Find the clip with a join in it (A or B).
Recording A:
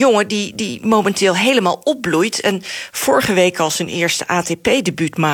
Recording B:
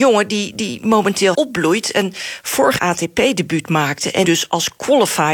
B